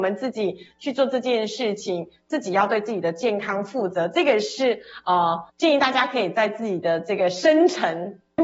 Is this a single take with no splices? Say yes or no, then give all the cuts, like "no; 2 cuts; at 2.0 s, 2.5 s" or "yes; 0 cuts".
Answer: no; 1 cut; at 5.5 s